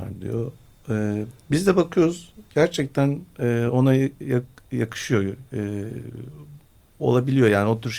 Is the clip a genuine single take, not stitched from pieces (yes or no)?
yes